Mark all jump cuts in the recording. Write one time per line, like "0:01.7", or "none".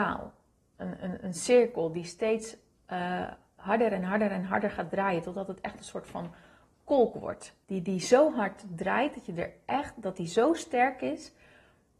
0:07.6